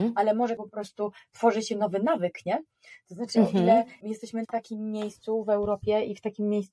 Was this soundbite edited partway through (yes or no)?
yes